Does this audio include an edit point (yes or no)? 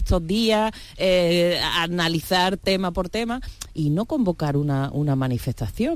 no